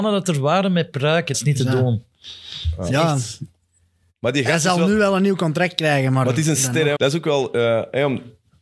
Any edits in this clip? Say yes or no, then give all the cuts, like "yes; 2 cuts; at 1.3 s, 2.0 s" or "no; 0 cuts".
yes; 3 cuts; at 0.9 s, 1.3 s, 7.0 s